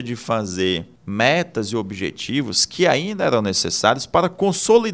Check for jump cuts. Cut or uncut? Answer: cut